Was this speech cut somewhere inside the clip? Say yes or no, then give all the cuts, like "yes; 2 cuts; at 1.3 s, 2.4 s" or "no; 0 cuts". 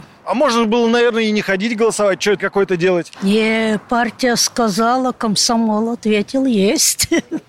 yes; 1 cut; at 2.4 s